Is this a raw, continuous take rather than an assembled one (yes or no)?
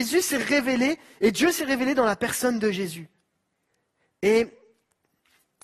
yes